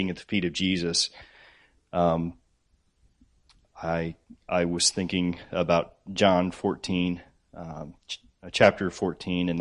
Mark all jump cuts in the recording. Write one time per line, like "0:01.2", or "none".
none